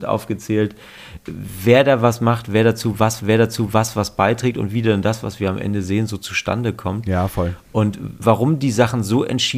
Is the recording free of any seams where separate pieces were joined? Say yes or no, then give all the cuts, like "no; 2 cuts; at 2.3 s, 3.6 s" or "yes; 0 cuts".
no; 2 cuts; at 3.2 s, 8.2 s